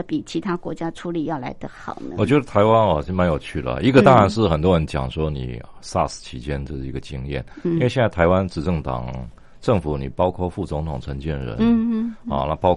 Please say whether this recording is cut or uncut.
uncut